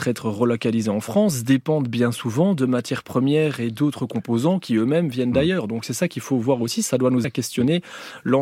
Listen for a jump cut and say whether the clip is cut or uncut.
cut